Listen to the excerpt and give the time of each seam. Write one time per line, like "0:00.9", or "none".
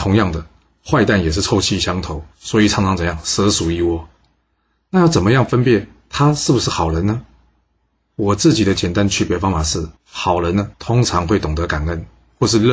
0:02.3
0:10.0
0:10.7